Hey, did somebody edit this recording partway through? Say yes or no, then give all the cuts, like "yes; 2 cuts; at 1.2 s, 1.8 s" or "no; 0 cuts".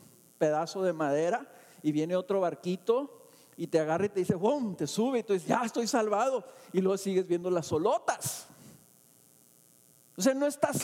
no; 0 cuts